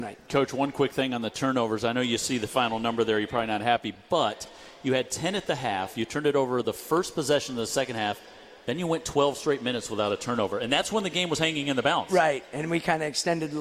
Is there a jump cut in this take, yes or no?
no